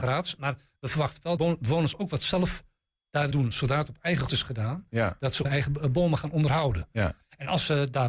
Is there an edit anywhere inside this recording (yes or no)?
yes